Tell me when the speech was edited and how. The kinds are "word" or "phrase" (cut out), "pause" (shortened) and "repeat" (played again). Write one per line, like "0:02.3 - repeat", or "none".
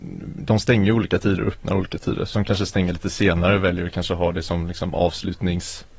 0:02.3 - word